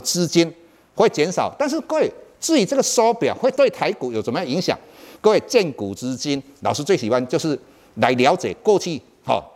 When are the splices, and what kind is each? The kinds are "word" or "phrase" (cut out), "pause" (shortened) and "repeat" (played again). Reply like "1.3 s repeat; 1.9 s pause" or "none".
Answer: none